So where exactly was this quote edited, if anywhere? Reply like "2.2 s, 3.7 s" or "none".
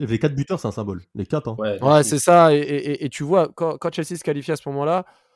3.5 s